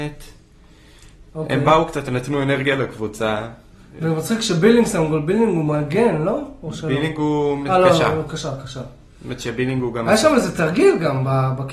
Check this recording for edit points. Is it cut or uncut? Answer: uncut